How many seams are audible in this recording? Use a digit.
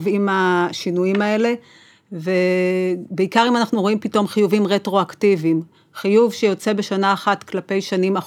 0